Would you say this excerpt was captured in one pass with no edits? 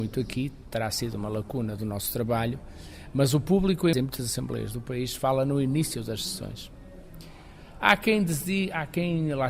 no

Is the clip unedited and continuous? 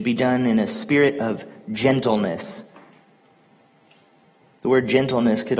yes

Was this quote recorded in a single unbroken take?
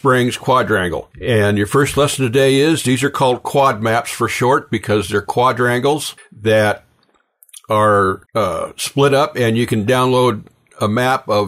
no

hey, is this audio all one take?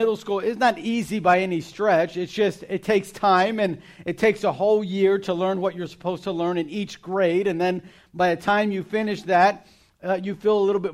yes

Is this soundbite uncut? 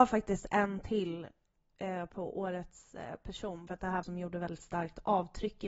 no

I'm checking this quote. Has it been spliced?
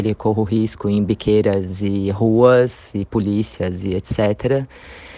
no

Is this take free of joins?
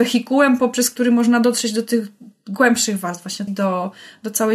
no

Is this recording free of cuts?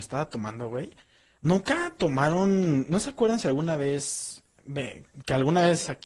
yes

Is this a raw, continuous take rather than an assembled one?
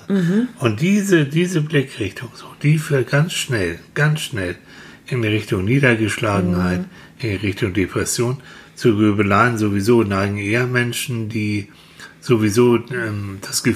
yes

